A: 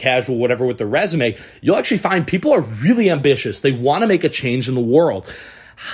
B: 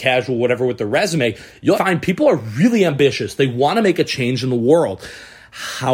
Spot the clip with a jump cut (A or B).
B